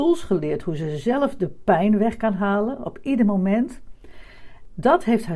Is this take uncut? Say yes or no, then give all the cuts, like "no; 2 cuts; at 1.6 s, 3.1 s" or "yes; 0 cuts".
yes; 0 cuts